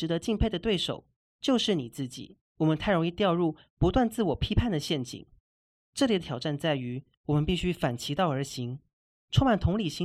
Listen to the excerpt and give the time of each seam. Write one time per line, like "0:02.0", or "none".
0:02.5